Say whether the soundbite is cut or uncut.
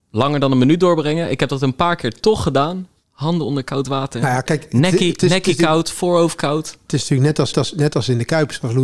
cut